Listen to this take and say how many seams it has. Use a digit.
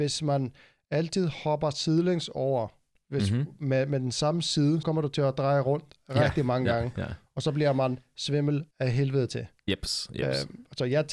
3